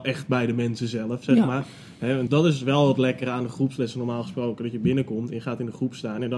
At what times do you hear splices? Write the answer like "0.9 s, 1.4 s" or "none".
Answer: 2.3 s